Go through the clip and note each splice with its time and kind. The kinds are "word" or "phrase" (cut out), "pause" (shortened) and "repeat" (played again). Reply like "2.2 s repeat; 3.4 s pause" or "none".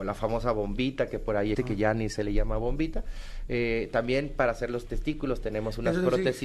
1.5 s word